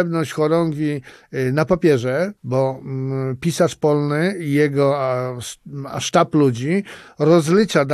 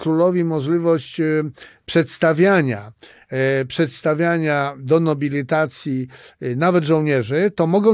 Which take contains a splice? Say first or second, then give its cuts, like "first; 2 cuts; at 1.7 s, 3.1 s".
first; 1 cut; at 2.4 s